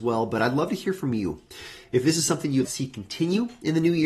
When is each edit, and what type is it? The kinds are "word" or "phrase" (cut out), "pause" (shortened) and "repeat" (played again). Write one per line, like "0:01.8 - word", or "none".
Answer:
0:02.6 - word